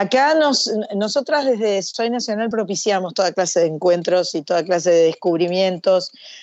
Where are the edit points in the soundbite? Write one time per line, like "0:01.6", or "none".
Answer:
none